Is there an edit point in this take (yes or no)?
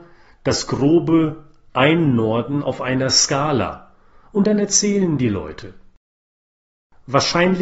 no